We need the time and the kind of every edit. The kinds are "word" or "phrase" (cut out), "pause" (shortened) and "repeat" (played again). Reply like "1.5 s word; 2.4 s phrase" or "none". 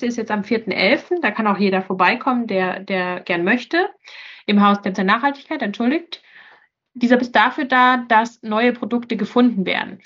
4.9 s phrase; 7.2 s word